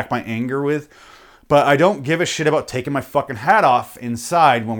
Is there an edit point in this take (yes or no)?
no